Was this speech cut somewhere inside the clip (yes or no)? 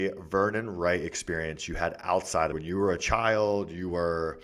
yes